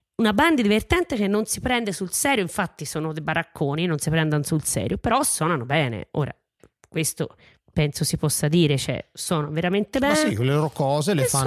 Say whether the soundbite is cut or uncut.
uncut